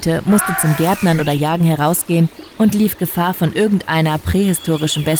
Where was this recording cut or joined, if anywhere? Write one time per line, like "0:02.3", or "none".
none